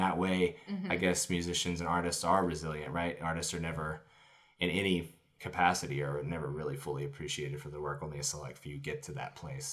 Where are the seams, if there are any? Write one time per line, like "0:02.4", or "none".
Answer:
none